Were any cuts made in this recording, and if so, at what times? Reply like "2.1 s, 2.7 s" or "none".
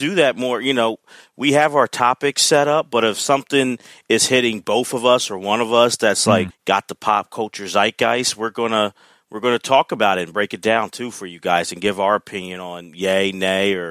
6.5 s